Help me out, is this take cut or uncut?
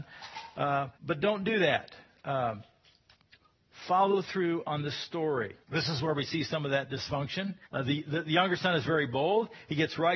cut